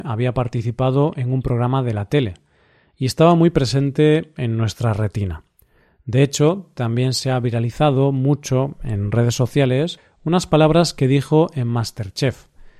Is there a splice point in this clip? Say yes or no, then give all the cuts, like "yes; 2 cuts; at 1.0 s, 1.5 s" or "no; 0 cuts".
no; 0 cuts